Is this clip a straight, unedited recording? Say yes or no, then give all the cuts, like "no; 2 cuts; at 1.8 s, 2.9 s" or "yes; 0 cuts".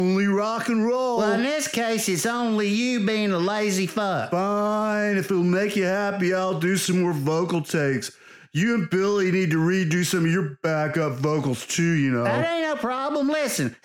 yes; 0 cuts